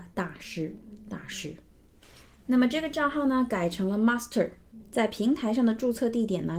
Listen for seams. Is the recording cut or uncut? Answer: uncut